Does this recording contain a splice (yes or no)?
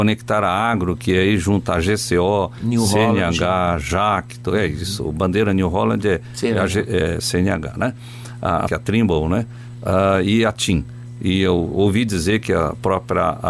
yes